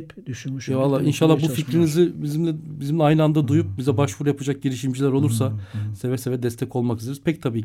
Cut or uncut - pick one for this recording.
uncut